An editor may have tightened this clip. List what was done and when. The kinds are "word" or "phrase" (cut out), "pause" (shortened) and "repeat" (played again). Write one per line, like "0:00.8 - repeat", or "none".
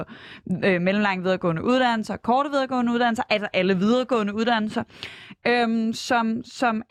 none

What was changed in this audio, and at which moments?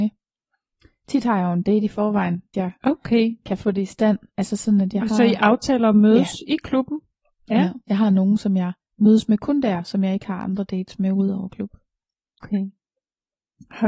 0:02.5 - word
0:08.8 - pause

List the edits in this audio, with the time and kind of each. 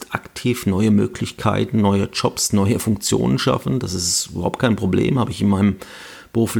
none

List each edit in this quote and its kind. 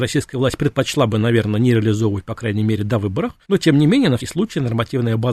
0:03.4 - pause
0:04.2 - word

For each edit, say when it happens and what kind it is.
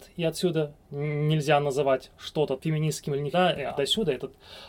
0:02.6 - word
0:03.3 - word
0:03.8 - word

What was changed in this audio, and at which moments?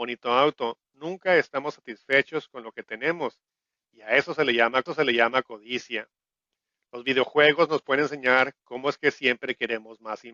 0:04.9 - repeat

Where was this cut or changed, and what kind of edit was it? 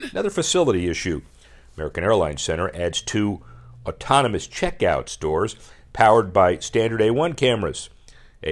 none

